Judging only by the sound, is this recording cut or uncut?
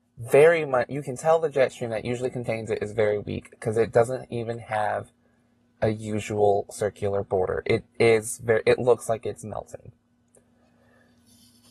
uncut